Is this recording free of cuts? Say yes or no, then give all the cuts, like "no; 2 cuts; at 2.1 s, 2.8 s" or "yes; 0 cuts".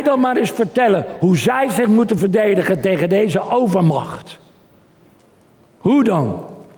yes; 0 cuts